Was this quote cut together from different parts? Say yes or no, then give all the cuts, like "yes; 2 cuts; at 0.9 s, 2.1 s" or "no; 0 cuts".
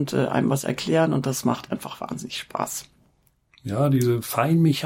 no; 0 cuts